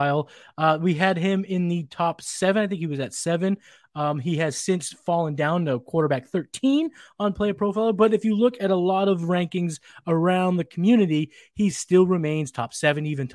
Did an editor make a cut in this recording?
no; 0 cuts

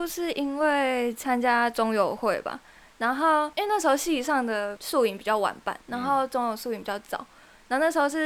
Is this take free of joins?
no; 2 cuts; at 3.5 s, 5.8 s

